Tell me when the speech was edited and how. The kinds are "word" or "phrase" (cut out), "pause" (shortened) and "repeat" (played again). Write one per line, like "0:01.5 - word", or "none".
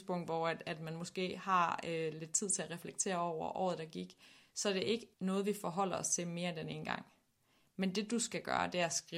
0:05.1 - pause

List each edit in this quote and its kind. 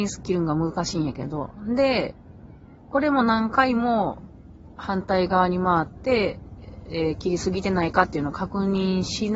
0:02.8 - pause

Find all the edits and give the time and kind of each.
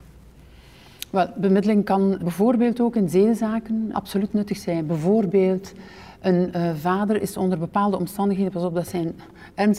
0:02.2 - word
0:03.9 - word

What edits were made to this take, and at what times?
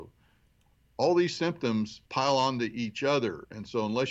0:02.1 - pause

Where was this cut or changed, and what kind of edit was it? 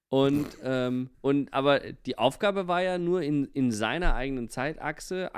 0:01.1 - pause

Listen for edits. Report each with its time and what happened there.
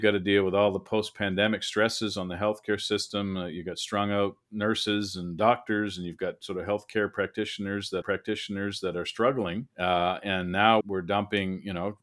0:08.0 - repeat
0:09.7 - pause
0:10.8 - word

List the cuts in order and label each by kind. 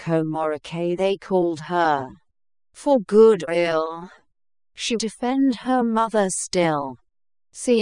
0:03.5 - word
0:05.0 - word

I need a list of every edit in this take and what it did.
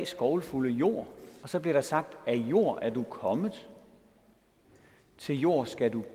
0:01.4 - phrase

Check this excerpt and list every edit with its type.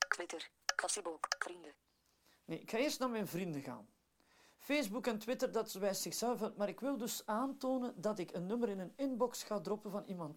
none

